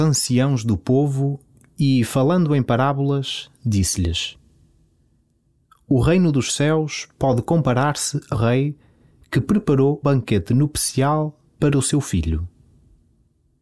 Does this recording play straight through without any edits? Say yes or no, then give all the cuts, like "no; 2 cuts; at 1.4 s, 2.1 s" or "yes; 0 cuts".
no; 2 cuts; at 8.3 s, 10.0 s